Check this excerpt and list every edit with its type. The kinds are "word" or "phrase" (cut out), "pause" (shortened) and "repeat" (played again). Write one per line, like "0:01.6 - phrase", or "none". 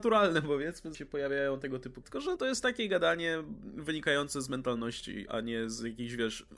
0:00.9 - word
0:02.0 - word
0:02.4 - word
0:05.3 - word